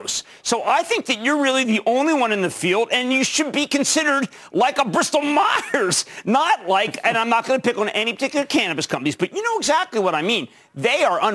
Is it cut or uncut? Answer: uncut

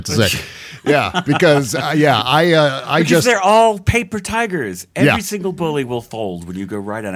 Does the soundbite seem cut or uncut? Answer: uncut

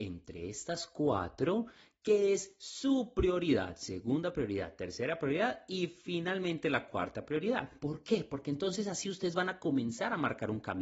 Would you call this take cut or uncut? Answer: uncut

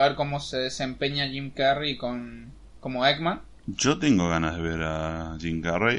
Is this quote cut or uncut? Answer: uncut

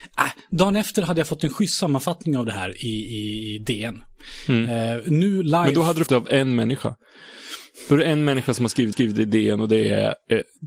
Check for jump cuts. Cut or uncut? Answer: cut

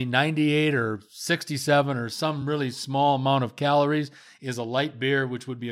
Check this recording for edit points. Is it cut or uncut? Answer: uncut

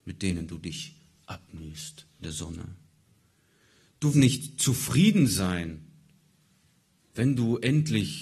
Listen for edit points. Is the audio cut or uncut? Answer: cut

